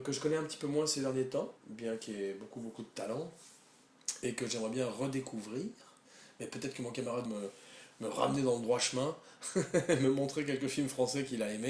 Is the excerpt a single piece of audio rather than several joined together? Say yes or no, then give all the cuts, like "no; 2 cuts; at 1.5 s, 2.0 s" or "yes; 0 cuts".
no; 2 cuts; at 1.6 s, 7.2 s